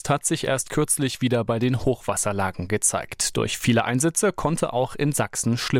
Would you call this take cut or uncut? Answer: uncut